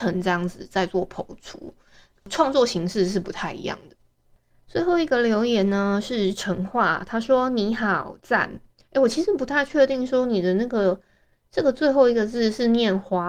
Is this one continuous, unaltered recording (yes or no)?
yes